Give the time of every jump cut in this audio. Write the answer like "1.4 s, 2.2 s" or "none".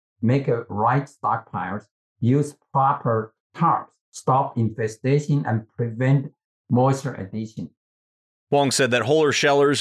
4.0 s